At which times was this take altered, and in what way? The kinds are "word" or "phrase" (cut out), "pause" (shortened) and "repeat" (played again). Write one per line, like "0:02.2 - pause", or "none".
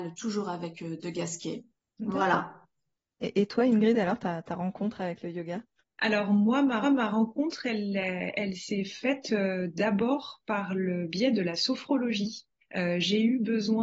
0:05.8 - pause
0:06.8 - repeat

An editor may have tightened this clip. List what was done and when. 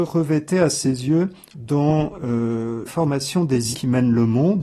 0:01.5 - word
0:02.9 - word
0:03.7 - word

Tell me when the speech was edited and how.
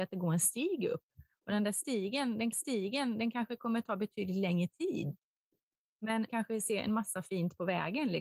0:02.5 - repeat
0:06.3 - word

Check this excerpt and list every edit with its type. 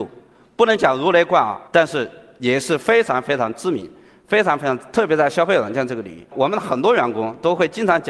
0:01.7 - pause

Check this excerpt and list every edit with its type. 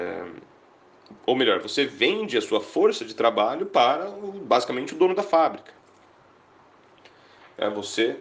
0:01.2 - pause

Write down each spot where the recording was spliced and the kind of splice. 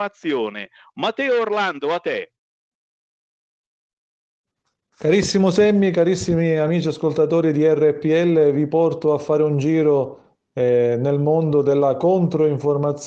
none

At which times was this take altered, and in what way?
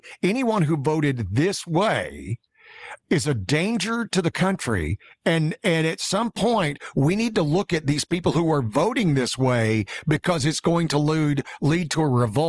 none

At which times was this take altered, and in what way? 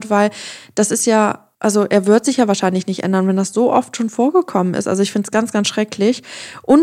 0:01.5 - pause

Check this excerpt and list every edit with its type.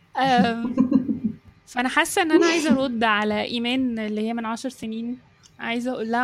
none

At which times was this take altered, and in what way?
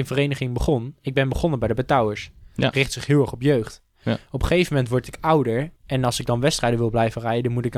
0:05.8 - pause

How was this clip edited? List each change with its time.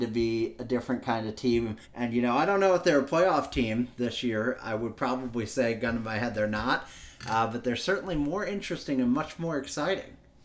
0:01.8 - pause

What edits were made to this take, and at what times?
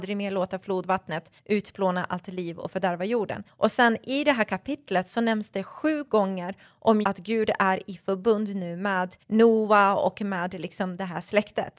0:01.4 - pause
0:03.5 - pause
0:07.0 - word
0:09.2 - pause

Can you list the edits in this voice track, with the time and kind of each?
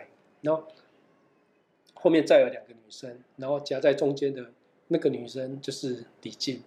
none

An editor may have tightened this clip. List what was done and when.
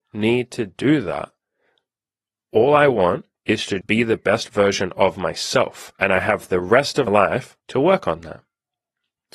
0:03.3 - pause
0:03.8 - word
0:05.9 - pause
0:07.1 - word
0:07.6 - pause

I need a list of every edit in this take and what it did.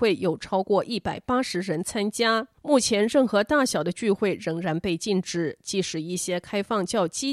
0:02.6 - pause

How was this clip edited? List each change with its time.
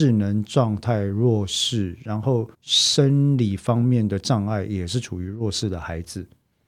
0:02.5 - pause

